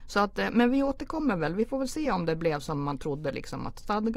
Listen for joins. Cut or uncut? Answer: uncut